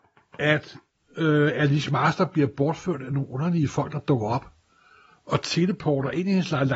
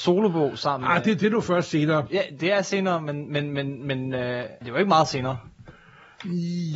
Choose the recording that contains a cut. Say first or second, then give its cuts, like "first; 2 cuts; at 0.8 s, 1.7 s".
second; 1 cut; at 4.6 s